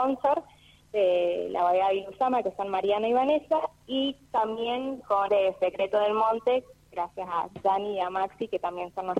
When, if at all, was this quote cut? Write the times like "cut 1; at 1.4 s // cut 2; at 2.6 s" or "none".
cut 1; at 5.3 s